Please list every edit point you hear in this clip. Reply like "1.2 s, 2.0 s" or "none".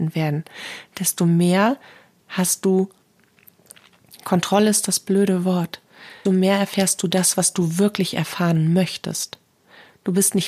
6.3 s